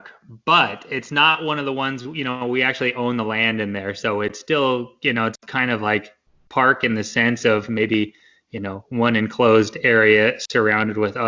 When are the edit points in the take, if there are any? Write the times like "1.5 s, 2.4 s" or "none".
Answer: none